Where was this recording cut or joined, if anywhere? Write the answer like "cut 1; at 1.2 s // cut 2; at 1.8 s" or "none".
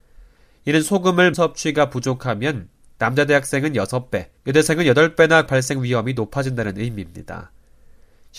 cut 1; at 1.3 s // cut 2; at 4.4 s // cut 3; at 5.5 s